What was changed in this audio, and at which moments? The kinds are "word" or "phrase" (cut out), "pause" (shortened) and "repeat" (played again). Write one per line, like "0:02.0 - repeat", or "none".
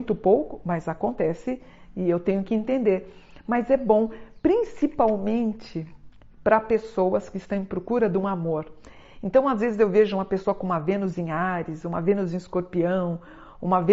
none